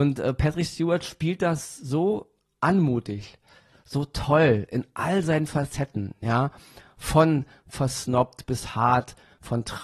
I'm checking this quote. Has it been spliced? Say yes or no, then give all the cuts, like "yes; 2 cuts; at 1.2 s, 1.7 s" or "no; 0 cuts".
no; 0 cuts